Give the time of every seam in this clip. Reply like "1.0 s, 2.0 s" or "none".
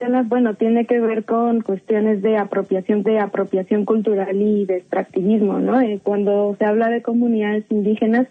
3.0 s